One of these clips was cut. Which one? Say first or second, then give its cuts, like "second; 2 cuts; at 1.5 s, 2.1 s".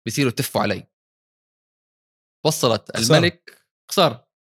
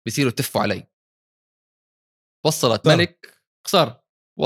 second; 1 cut; at 2.8 s